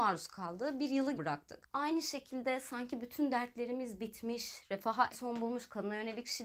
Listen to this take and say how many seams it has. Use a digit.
2